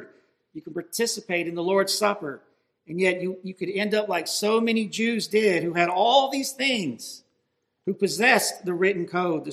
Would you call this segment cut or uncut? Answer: uncut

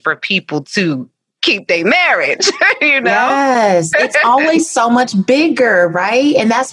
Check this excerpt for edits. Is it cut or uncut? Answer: uncut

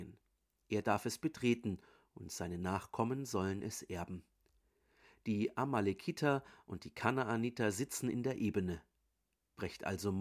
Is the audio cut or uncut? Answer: uncut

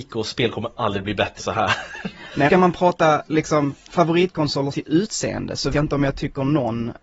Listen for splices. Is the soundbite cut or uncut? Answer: cut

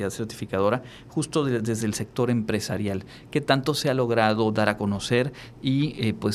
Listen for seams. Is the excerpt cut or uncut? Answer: uncut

